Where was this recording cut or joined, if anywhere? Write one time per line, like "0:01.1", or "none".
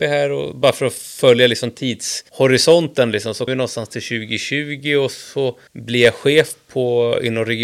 0:02.3
0:03.5
0:05.7